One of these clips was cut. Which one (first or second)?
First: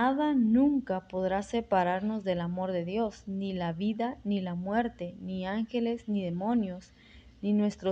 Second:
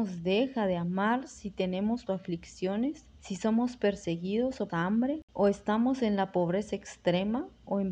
second